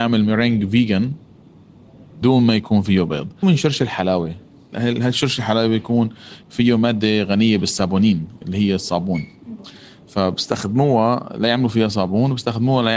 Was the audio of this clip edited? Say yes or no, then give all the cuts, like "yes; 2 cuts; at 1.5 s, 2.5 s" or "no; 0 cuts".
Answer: yes; 3 cuts; at 2.2 s, 3.4 s, 4.7 s